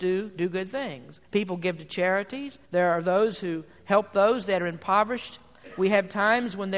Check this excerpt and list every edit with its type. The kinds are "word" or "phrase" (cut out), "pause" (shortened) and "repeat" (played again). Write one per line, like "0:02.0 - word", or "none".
0:01.2 - pause
0:02.6 - pause